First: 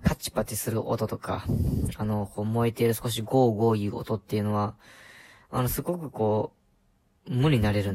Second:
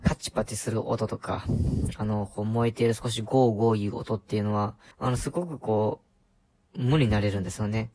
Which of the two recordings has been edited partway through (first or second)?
second